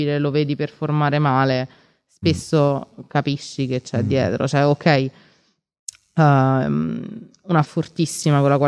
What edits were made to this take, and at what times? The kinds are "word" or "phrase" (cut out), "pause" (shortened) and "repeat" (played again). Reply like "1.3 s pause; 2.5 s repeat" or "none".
7.6 s word